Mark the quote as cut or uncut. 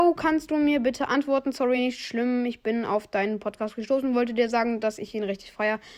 uncut